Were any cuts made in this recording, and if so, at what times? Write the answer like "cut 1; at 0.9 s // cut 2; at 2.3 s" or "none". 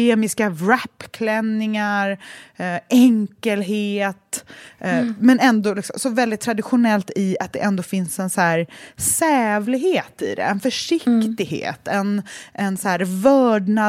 none